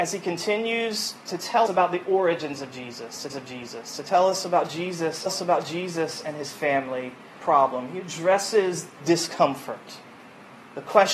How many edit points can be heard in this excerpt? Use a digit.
5